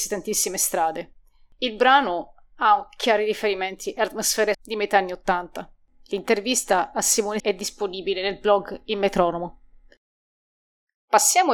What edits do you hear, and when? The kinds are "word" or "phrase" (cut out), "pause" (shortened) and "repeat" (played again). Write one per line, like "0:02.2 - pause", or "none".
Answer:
0:04.5 - word
0:07.4 - word